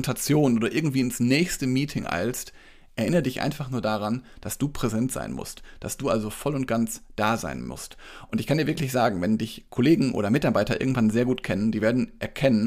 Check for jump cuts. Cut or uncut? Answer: uncut